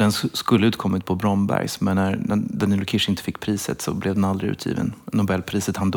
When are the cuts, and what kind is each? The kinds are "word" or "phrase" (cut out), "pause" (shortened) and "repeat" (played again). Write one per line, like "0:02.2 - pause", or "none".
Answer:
none